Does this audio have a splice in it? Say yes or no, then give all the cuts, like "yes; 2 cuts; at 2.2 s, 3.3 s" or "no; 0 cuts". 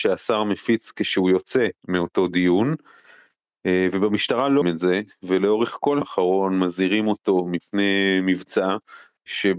yes; 3 cuts; at 1.8 s, 4.6 s, 6.0 s